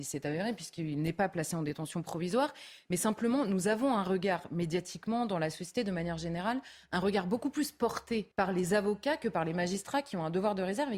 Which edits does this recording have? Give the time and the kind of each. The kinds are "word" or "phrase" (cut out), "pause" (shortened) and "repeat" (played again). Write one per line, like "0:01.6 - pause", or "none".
0:08.3 - pause